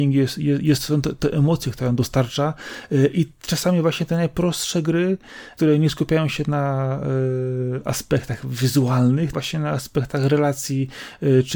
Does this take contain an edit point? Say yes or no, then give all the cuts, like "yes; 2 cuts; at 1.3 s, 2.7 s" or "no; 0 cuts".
yes; 1 cut; at 9.3 s